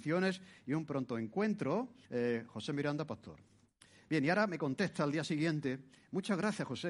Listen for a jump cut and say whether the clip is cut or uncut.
cut